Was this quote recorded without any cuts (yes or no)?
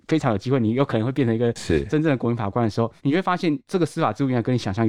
no